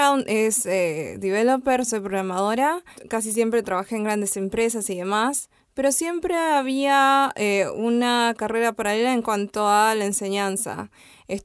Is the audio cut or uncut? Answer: uncut